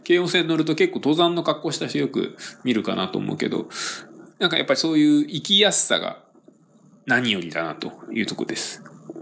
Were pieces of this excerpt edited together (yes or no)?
no